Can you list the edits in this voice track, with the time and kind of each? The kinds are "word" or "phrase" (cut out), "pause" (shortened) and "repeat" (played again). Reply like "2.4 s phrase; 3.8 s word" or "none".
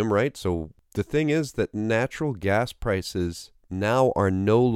none